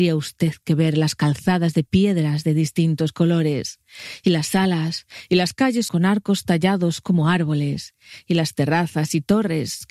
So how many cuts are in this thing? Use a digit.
1